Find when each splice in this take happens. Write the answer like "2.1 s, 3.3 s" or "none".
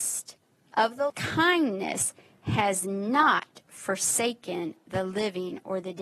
1.1 s